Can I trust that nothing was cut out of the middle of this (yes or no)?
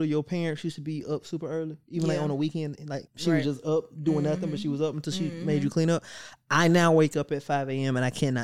no